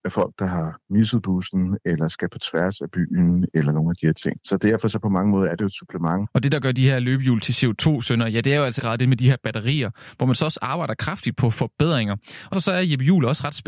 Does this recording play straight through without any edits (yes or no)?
no